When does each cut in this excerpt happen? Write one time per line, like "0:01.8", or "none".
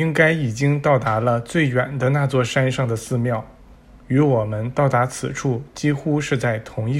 none